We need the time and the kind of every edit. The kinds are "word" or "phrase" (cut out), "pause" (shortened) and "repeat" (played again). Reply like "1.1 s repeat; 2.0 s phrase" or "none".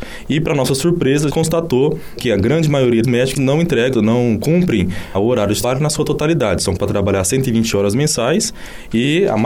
1.3 s word; 2.2 s word; 3.0 s word; 3.4 s word; 3.9 s word; 5.1 s word; 5.6 s word; 6.8 s word